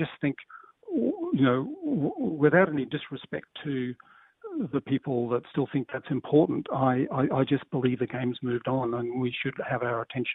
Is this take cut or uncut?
uncut